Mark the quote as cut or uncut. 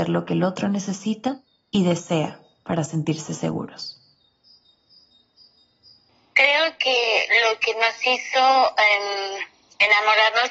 uncut